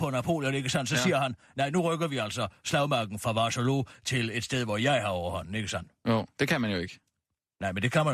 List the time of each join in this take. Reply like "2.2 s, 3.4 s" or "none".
none